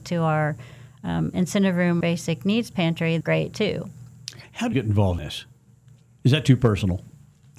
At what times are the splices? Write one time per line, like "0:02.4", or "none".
0:02.0
0:03.2
0:04.7
0:05.2